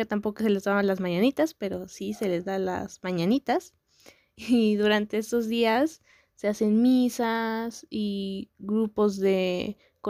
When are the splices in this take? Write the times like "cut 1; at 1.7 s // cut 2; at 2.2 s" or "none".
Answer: none